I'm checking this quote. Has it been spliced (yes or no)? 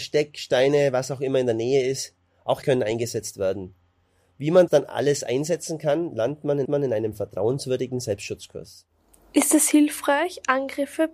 yes